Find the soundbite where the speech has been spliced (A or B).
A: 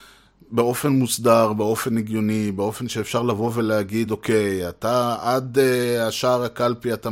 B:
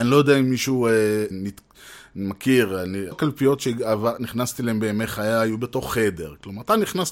B